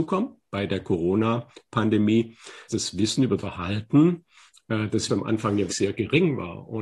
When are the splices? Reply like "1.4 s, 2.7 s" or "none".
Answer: 2.7 s, 3.4 s, 5.1 s, 5.7 s